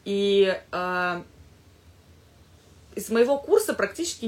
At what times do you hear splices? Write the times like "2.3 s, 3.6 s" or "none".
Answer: none